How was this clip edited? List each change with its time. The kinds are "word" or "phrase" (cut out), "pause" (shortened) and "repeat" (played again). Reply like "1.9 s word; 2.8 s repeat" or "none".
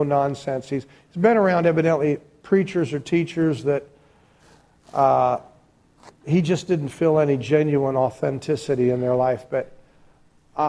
none

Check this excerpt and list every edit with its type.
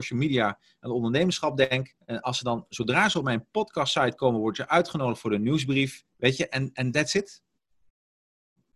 2.0 s pause; 6.1 s pause

